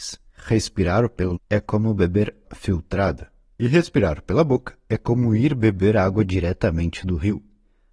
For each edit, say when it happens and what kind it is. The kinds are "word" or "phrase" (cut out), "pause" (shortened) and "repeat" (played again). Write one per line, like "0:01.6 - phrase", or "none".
0:01.3 - word
0:02.4 - word